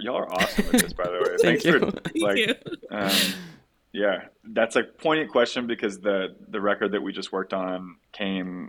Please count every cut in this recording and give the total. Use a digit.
0